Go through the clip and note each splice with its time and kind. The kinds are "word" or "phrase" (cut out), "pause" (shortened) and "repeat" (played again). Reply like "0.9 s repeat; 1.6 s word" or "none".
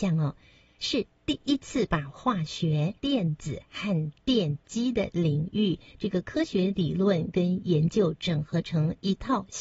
3.0 s pause